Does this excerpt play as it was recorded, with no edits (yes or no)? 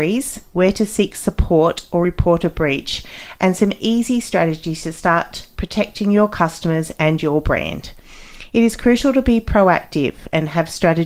yes